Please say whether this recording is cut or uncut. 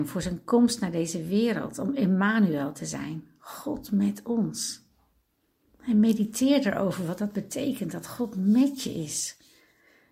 uncut